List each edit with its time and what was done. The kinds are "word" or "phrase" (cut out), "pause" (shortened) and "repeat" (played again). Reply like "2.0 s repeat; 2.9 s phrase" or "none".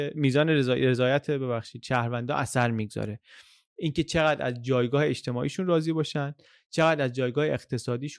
none